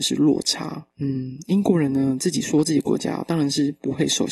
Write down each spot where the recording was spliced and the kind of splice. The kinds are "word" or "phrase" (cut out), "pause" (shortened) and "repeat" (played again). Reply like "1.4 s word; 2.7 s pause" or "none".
0.9 s pause